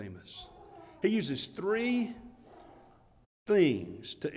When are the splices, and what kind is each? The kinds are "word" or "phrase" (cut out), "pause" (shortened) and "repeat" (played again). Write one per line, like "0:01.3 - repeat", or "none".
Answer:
none